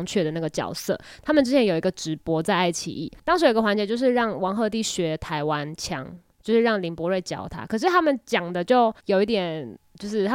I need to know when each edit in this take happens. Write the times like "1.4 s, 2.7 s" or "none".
9.0 s